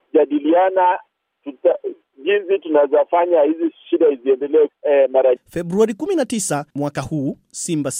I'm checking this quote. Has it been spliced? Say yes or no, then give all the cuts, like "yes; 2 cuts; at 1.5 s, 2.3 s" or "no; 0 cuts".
yes; 2 cuts; at 4.7 s, 5.4 s